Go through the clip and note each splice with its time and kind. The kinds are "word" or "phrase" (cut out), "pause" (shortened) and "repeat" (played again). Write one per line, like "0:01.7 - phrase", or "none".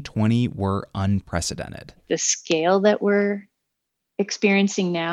none